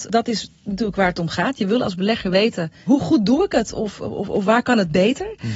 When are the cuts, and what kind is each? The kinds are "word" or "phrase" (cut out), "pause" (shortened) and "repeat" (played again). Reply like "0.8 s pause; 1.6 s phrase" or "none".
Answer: none